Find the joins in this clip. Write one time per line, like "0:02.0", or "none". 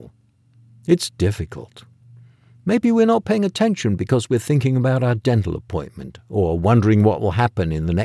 none